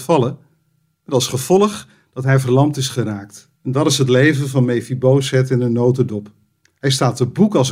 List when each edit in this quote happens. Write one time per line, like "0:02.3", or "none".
0:03.6